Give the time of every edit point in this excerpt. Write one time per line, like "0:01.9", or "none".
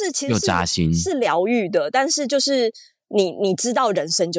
none